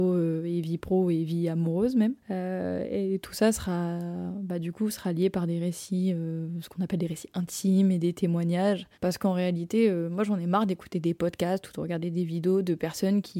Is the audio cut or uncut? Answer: cut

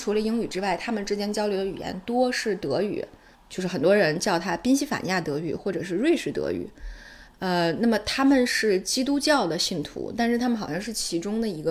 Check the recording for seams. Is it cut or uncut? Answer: cut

